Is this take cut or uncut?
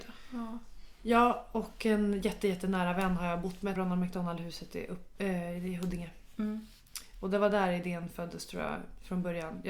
cut